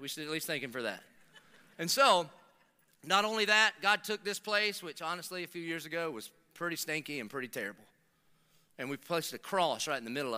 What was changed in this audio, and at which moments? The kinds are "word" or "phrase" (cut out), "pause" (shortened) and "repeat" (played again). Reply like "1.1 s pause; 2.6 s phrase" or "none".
none